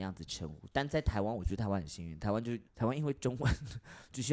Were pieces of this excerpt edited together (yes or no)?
yes